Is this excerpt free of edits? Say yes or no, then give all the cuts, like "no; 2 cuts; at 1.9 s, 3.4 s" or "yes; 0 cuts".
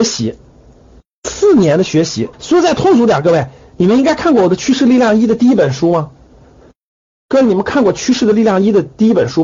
no; 1 cut; at 2.3 s